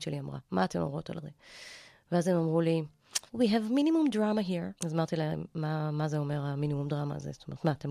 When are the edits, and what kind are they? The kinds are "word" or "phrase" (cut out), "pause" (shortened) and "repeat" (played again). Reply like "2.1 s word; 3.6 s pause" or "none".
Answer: 3.3 s pause; 4.8 s pause

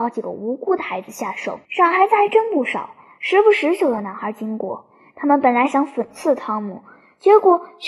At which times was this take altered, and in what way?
1.6 s pause

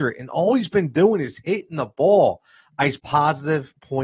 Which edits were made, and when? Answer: 3.0 s word

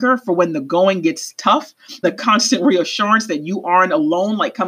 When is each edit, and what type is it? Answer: 2.0 s word

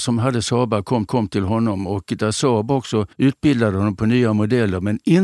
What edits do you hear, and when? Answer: 1.1 s repeat; 3.1 s pause

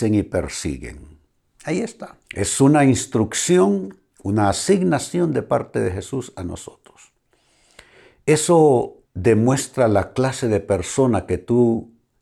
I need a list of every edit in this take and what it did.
1.5 s pause; 2.2 s pause; 4.1 s pause; 9.0 s pause

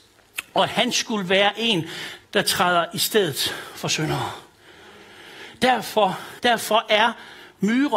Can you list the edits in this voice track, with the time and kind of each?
2.2 s pause; 6.4 s pause

